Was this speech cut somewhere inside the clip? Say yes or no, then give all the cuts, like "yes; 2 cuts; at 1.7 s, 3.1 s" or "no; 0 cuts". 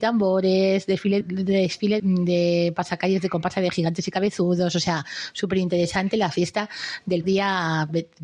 yes; 3 cuts; at 1.2 s, 2.0 s, 7.2 s